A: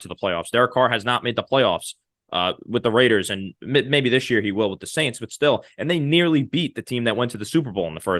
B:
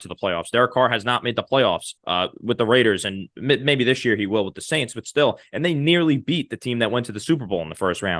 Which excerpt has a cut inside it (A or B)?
B